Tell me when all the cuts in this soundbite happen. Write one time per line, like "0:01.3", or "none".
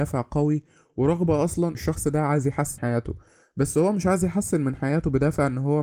0:01.7
0:02.8